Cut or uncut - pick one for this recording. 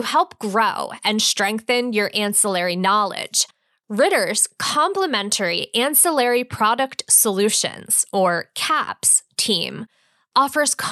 uncut